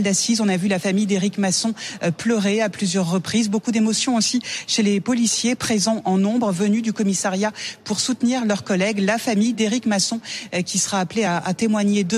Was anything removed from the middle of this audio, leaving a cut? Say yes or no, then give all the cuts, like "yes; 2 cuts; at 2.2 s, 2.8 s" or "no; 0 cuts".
no; 0 cuts